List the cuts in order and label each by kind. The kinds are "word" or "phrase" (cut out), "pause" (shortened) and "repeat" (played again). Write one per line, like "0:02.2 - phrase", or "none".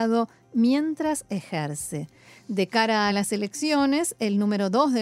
none